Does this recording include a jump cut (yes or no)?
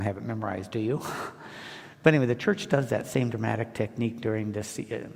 no